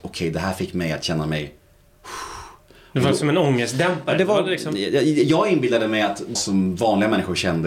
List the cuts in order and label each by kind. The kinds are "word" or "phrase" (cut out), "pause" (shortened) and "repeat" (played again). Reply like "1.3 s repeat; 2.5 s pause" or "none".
6.4 s word